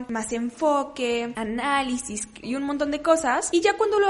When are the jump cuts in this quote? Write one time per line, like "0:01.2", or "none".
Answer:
0:02.4